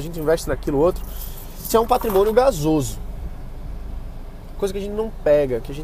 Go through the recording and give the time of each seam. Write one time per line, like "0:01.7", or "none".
0:01.7
0:04.6